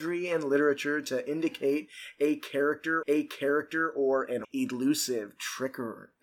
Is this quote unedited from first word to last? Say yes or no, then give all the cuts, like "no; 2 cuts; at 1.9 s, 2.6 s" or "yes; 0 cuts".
no; 2 cuts; at 3.0 s, 4.4 s